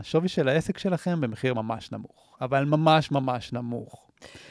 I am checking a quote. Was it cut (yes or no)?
no